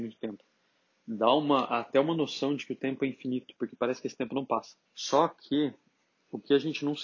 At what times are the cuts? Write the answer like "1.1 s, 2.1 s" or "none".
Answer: 4.9 s

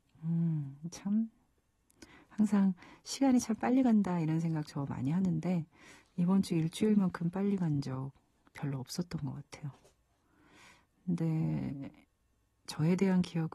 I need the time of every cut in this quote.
none

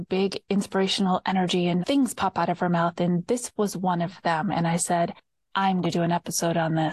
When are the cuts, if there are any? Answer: 1.8 s, 5.8 s

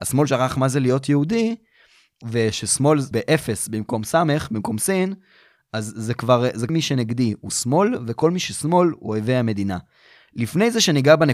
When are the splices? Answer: 3.1 s, 6.7 s

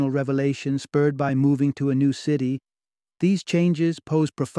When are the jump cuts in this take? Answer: none

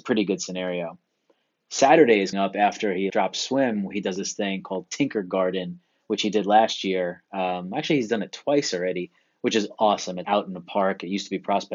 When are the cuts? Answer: 2.3 s, 3.1 s, 10.2 s

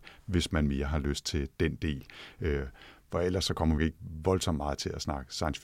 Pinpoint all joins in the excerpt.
3.8 s

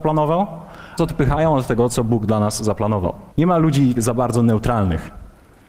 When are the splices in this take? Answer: 1.0 s, 3.3 s, 4.0 s

